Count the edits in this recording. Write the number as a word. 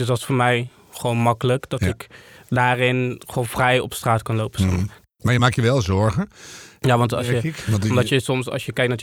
zero